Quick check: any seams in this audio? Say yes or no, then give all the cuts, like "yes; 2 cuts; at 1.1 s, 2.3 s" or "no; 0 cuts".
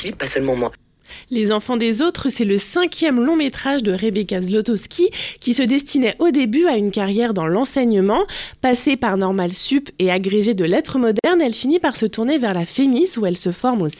no; 0 cuts